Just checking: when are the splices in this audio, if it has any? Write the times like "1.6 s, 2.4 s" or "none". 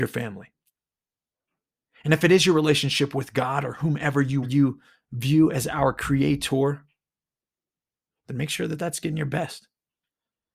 4.4 s